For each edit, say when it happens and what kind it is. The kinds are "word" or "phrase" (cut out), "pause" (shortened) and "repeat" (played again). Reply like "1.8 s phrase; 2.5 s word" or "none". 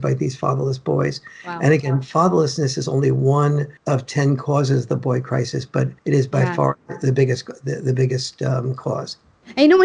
3.8 s pause; 6.0 s pause